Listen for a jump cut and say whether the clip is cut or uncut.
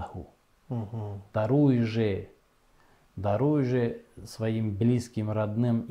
uncut